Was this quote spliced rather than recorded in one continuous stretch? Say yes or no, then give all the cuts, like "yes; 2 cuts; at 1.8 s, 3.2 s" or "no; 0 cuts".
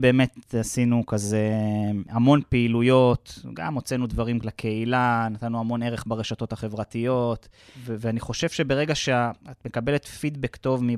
no; 0 cuts